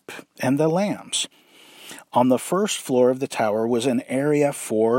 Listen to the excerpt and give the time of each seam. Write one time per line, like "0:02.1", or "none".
none